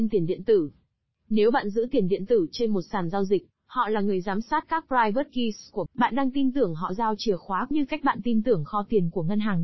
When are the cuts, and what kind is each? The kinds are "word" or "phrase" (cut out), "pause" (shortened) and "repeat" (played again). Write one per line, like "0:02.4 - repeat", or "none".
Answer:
0:05.9 - word
0:07.7 - phrase